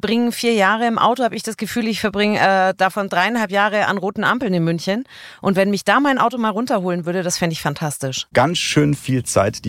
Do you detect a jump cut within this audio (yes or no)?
no